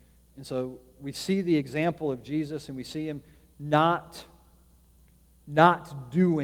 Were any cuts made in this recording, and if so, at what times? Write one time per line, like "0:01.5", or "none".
none